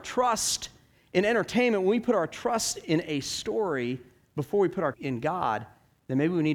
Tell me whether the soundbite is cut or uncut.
cut